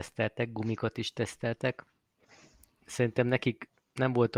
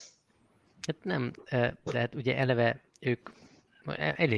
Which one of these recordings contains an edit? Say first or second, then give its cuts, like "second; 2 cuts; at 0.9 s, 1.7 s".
second; 1 cut; at 2.9 s